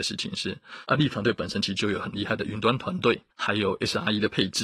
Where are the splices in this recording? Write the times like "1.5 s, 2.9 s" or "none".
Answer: 3.3 s